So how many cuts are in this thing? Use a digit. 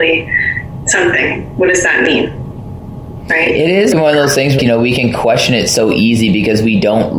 2